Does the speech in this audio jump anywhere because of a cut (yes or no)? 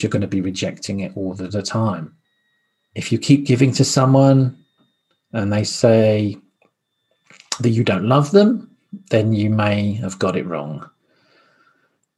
no